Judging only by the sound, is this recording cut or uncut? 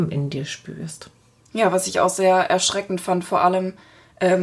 uncut